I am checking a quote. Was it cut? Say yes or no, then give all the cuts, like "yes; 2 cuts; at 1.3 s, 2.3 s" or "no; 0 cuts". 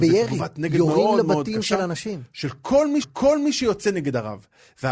yes; 1 cut; at 3.0 s